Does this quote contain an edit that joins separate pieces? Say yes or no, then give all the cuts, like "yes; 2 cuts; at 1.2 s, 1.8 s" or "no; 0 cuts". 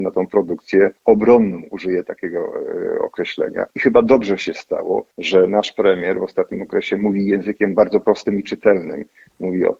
yes; 3 cuts; at 1.0 s, 3.7 s, 5.1 s